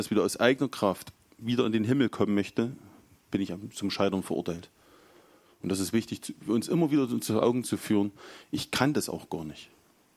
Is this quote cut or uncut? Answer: uncut